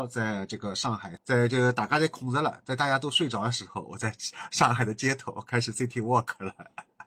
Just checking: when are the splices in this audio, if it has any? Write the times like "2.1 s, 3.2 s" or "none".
1.2 s

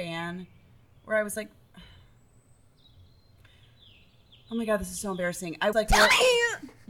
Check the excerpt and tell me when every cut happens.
5.7 s

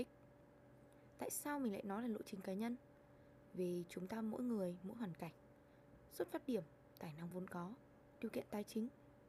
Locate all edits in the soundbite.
none

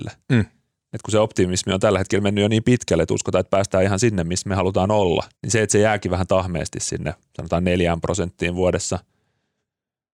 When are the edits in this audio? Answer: 5.3 s

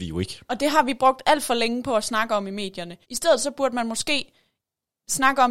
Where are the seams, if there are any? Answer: 3.0 s

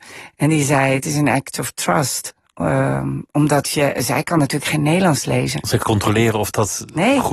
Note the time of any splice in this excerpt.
5.8 s

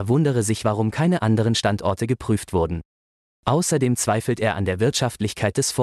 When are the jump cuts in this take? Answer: none

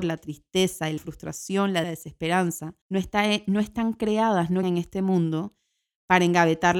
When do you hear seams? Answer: 1.0 s, 1.8 s, 2.8 s, 4.6 s

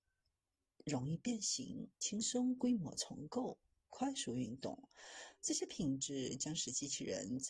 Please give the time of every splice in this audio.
1.9 s

